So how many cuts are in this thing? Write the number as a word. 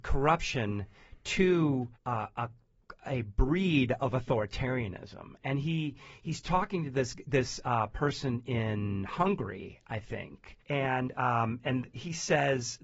two